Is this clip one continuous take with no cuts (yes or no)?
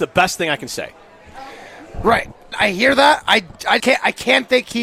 no